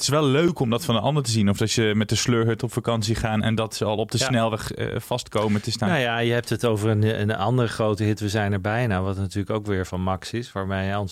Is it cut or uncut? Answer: uncut